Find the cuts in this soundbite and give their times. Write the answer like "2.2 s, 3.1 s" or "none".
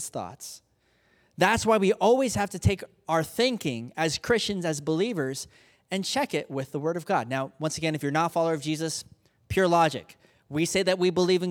none